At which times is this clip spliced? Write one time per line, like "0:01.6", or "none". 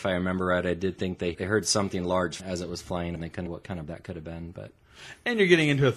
0:01.3
0:02.4
0:03.1
0:03.5
0:03.9